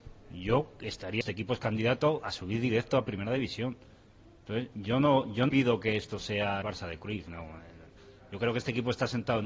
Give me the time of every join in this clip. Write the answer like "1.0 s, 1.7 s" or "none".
1.2 s, 5.5 s, 6.6 s